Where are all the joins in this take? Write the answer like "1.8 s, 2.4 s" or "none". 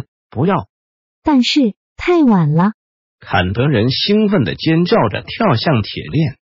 none